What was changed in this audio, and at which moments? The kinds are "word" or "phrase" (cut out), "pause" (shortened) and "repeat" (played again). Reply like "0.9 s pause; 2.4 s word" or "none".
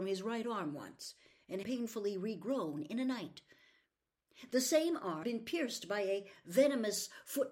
1.6 s phrase; 5.2 s word